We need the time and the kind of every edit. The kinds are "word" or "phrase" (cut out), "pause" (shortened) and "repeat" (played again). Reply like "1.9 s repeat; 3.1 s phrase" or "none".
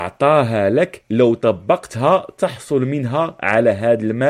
none